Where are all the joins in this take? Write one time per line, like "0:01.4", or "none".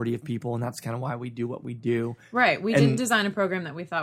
none